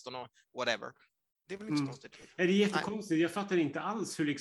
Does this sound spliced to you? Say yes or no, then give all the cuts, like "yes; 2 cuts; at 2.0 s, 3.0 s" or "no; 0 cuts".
no; 0 cuts